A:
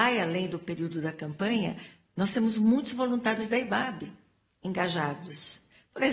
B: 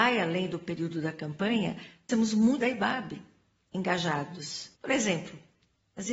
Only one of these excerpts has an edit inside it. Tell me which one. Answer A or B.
B